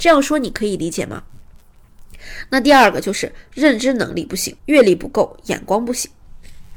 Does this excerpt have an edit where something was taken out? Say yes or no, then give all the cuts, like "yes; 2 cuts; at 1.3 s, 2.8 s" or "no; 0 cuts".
yes; 1 cut; at 4.6 s